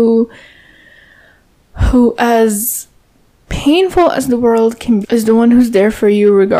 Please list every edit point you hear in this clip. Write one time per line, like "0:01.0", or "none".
0:05.0

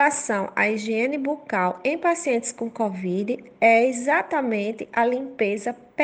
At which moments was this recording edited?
none

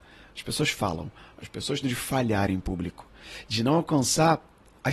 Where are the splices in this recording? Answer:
0:01.8

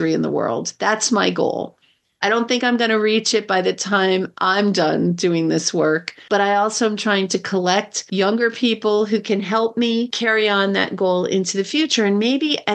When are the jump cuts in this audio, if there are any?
none

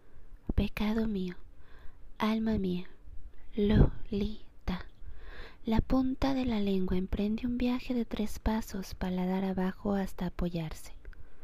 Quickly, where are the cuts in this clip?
none

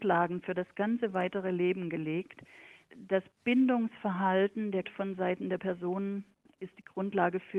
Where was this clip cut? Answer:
0:02.9
0:04.8
0:05.6

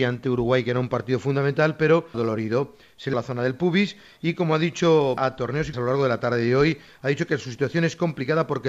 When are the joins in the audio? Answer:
0:02.1
0:03.1
0:05.2
0:05.7

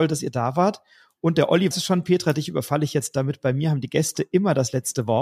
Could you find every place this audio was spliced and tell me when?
0:01.7

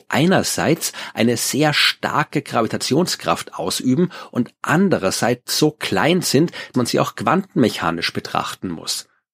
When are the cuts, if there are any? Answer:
0:06.7

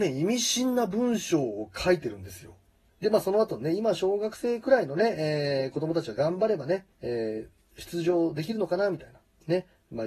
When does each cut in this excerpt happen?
0:06.9

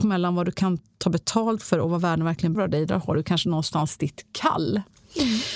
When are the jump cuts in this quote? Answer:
0:02.5

